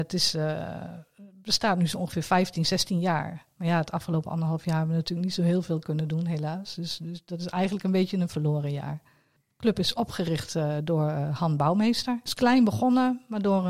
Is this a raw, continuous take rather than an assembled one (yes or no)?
yes